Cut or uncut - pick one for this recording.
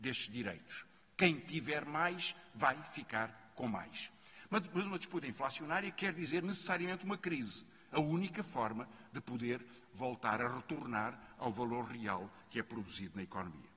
uncut